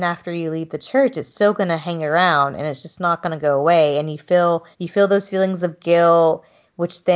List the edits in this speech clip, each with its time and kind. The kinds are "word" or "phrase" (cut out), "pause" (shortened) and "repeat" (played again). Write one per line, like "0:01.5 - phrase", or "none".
0:04.7 - pause